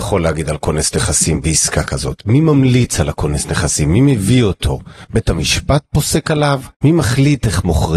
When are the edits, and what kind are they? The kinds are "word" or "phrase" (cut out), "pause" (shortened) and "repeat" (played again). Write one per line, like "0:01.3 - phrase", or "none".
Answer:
0:06.7 - pause